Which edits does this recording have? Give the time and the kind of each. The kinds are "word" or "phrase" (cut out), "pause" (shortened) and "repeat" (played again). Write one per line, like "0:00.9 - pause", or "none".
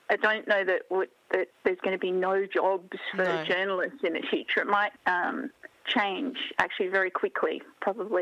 0:01.5 - pause
0:05.0 - word
0:05.8 - pause